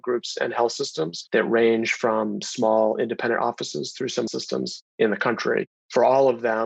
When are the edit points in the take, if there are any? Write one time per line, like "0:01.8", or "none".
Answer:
0:04.3